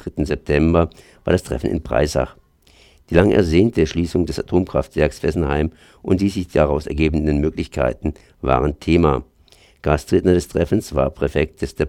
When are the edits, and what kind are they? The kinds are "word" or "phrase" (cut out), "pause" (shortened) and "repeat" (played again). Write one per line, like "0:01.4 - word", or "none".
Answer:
none